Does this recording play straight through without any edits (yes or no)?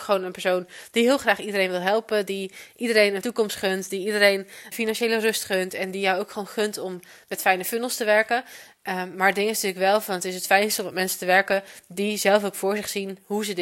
no